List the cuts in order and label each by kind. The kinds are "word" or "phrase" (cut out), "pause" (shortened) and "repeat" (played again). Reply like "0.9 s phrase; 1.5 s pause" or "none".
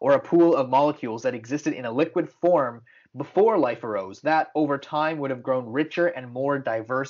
none